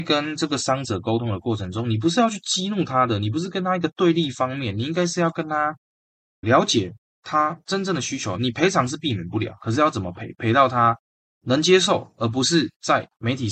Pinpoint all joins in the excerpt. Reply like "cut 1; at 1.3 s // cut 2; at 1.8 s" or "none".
cut 1; at 6.4 s